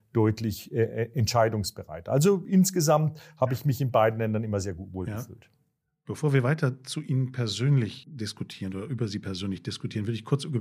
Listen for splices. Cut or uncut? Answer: uncut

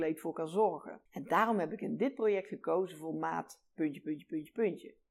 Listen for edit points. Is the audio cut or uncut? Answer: cut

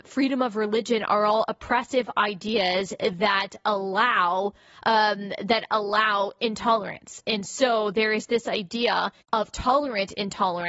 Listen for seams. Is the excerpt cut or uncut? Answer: cut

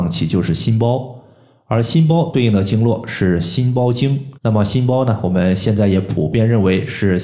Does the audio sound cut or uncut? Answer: cut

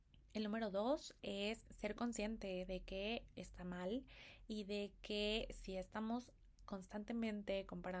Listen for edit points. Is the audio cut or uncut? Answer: uncut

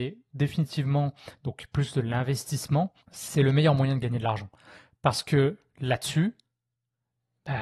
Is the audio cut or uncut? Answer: cut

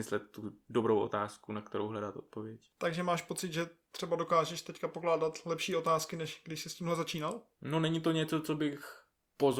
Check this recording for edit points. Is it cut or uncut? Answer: uncut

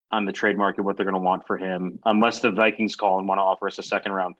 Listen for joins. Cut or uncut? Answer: uncut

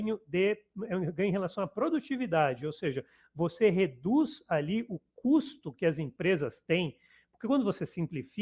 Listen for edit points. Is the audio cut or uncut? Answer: uncut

